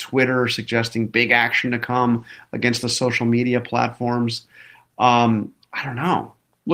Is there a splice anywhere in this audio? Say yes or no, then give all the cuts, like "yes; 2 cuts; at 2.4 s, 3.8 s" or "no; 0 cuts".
no; 0 cuts